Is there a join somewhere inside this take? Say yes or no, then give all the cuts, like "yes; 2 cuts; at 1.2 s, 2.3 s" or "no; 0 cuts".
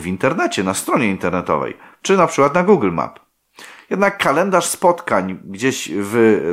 no; 0 cuts